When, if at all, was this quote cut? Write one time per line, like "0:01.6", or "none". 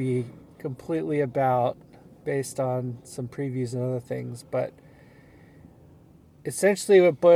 none